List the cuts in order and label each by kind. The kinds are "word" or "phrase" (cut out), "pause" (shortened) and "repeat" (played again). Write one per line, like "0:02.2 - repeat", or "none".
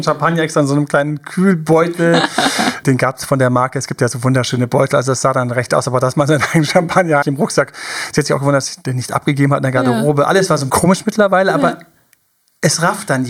0:02.8 - word
0:05.7 - word
0:07.2 - word
0:10.7 - word